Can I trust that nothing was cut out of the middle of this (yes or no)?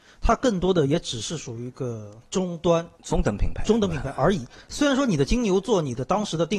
no